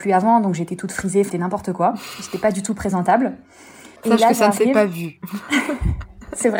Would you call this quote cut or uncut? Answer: cut